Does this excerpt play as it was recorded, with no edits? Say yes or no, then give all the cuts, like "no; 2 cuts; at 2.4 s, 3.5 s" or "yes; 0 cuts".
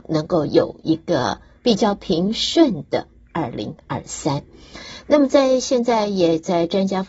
yes; 0 cuts